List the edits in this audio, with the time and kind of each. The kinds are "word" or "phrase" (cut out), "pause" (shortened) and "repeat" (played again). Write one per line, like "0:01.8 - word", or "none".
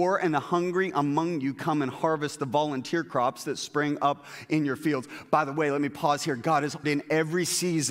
0:06.8 - phrase